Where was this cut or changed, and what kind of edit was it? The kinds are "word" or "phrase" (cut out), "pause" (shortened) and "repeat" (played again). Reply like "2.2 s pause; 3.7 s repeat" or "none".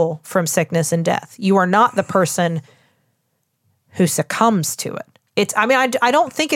none